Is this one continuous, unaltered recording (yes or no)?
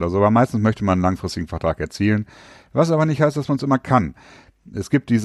yes